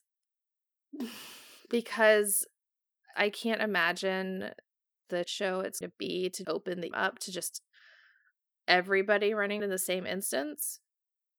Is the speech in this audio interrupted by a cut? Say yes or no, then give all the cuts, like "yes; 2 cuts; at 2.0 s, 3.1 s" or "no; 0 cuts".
yes; 6 cuts; at 3.1 s, 5.2 s, 5.8 s, 6.4 s, 6.9 s, 9.6 s